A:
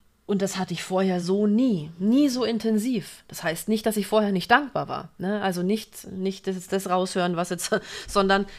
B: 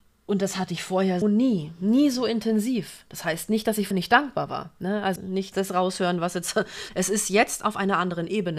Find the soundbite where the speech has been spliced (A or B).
B